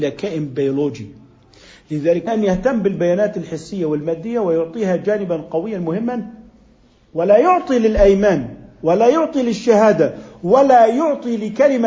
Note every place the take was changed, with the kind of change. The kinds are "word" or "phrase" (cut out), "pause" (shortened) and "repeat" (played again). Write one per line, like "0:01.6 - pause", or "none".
0:02.3 - word